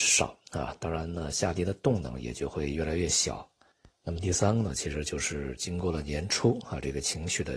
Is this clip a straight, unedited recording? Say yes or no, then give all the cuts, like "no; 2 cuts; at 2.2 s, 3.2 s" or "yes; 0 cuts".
yes; 0 cuts